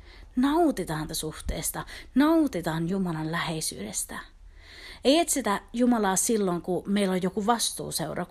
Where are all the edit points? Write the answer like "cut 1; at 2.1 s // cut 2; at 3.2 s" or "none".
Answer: cut 1; at 1.1 s